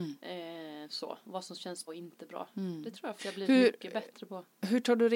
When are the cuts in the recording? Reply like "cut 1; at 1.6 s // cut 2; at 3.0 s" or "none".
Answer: cut 1; at 1.9 s // cut 2; at 3.2 s